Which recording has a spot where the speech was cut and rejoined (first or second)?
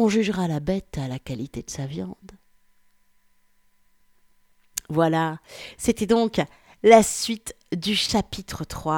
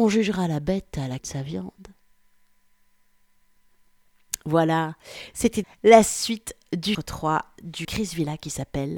second